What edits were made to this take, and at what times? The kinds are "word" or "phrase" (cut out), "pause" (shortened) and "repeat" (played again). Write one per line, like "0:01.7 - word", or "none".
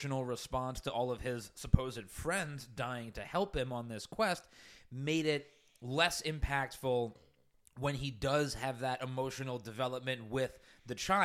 none